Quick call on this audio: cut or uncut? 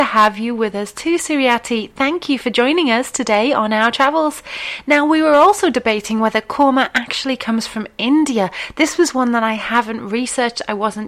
uncut